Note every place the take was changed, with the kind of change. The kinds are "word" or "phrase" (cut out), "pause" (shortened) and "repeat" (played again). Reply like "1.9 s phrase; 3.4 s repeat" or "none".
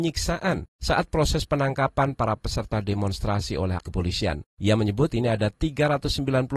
3.8 s word; 5.1 s word